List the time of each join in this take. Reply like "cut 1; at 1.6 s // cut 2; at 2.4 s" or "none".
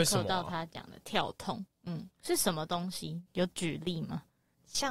cut 1; at 3.3 s